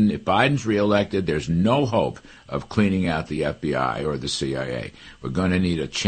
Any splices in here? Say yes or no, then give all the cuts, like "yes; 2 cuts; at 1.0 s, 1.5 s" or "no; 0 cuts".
no; 0 cuts